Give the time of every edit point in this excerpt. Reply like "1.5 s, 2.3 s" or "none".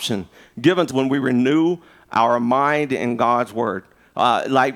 0.9 s